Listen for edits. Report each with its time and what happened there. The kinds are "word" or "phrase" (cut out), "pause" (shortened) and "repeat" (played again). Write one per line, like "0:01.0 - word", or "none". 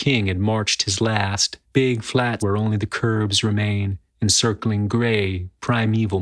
0:01.6 - pause
0:02.4 - word
0:04.1 - pause